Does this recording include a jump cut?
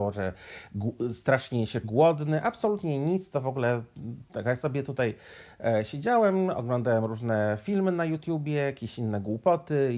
yes; 1 cut; at 1.8 s

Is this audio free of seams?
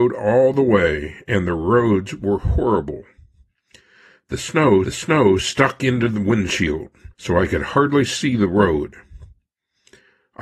no; 2 cuts; at 4.8 s, 7.1 s

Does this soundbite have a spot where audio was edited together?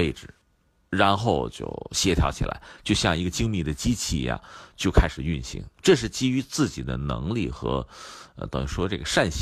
yes; 1 cut; at 5.7 s

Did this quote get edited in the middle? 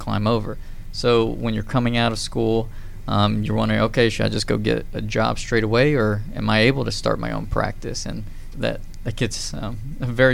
yes; 1 cut; at 8.5 s

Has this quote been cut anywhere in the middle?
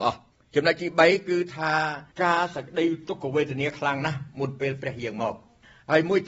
yes; 1 cut; at 2.1 s

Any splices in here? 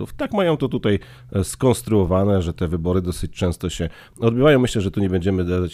no; 0 cuts

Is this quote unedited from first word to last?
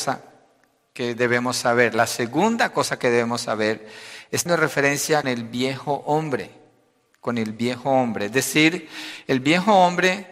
no; 2 cuts; at 4.5 s, 5.2 s

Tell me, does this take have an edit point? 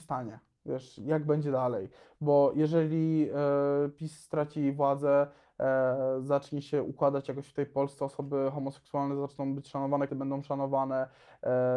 yes; 1 cut; at 10.1 s

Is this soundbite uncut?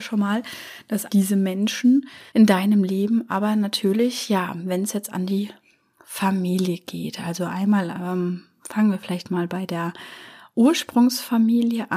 no; 2 cuts; at 1.1 s, 2.3 s

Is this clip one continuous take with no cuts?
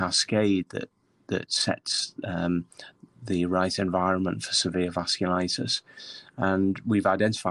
yes; 0 cuts

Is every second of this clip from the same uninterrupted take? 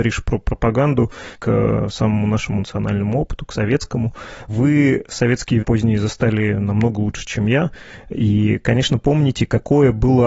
no; 3 cuts; at 1.3 s, 2.6 s, 5.6 s

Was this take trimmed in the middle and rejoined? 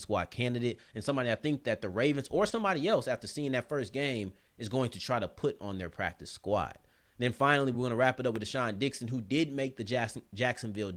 no; 0 cuts

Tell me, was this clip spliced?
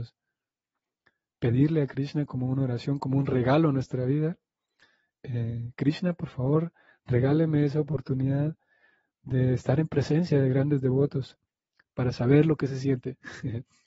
no; 0 cuts

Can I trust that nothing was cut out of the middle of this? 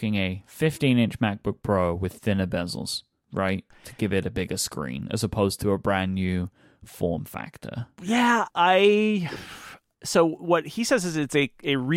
no; 1 cut; at 8.5 s

